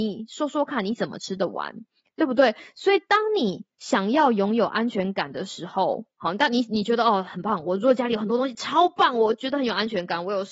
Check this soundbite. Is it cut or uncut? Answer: cut